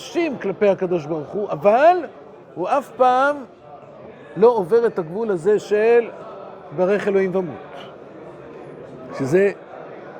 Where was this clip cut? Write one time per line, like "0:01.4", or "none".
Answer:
0:02.4